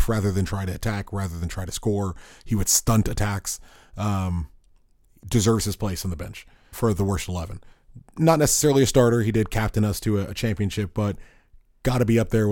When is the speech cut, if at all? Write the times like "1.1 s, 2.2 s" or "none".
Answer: 6.7 s

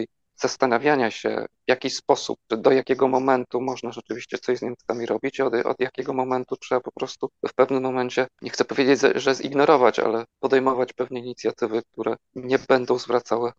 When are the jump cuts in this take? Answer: 2.5 s, 7.4 s, 8.3 s, 10.3 s

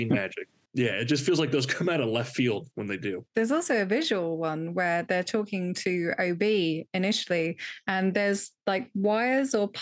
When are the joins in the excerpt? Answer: 3.3 s

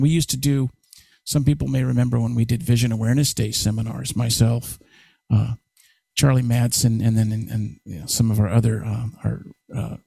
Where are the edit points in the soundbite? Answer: none

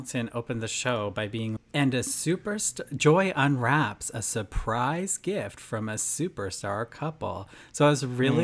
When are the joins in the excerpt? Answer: 1.6 s

